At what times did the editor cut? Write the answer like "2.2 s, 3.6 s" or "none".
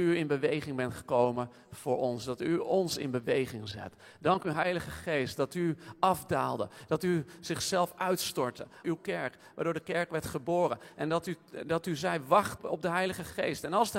8.8 s, 12.6 s

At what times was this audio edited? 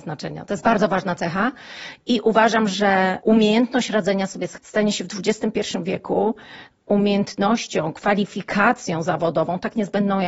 4.6 s

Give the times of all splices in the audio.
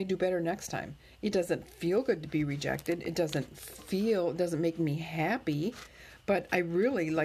none

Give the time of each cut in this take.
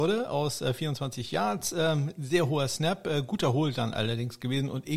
none

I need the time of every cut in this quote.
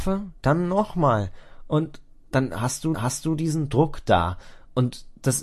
2.1 s, 2.9 s

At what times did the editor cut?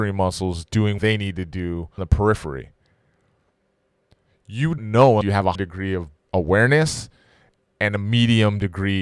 1.0 s, 2.0 s, 4.8 s, 5.2 s, 5.5 s, 6.2 s

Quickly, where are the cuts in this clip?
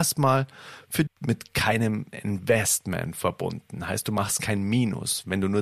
1.1 s, 2.1 s

